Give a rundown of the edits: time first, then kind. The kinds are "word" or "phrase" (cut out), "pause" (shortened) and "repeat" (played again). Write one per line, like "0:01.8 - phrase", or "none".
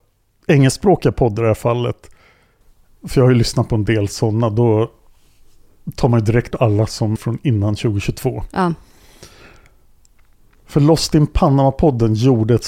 0:06.5 - word
0:07.2 - word